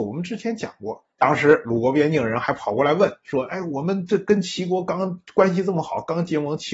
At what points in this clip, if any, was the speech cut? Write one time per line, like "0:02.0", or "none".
0:01.1